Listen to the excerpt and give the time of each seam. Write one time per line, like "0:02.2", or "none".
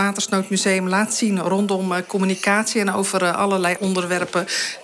0:03.8